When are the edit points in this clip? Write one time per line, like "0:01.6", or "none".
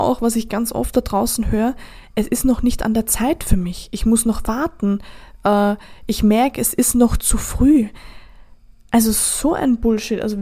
none